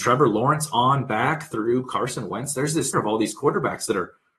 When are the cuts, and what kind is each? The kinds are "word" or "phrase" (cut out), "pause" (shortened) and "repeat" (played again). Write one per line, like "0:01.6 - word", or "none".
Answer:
0:02.9 - word